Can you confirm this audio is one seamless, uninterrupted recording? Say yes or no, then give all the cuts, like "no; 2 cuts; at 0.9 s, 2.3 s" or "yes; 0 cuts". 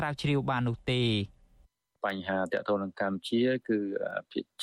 yes; 0 cuts